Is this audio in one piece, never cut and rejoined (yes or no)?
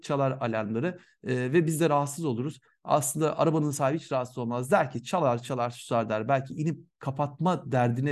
yes